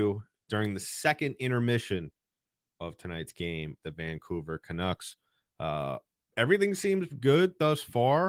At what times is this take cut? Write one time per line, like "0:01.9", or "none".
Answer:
0:03.8
0:07.1